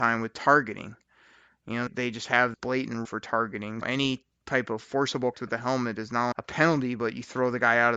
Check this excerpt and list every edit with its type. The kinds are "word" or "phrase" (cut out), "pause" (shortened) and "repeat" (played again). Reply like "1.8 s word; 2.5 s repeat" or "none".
1.9 s word; 2.5 s word; 3.0 s word; 3.8 s word; 5.3 s word; 6.3 s word